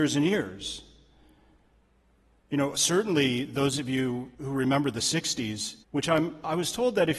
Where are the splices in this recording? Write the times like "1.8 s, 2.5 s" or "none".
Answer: 4.3 s, 5.8 s